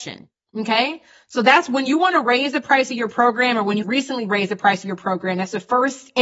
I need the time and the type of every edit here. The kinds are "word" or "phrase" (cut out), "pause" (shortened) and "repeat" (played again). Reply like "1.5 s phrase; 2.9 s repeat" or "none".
3.8 s word